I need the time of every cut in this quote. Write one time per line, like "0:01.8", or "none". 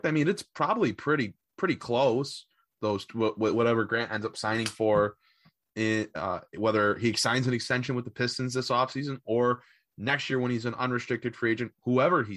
none